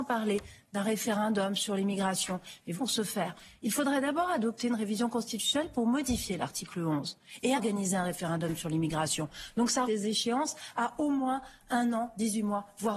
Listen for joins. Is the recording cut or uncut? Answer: cut